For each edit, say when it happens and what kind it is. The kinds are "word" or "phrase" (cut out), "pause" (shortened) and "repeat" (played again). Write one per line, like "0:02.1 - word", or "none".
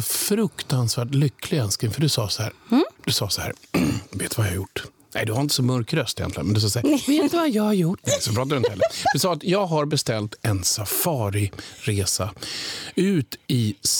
0:03.0 - pause